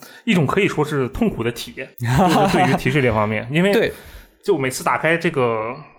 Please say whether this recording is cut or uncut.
cut